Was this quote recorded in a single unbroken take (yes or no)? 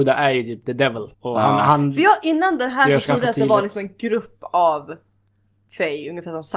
no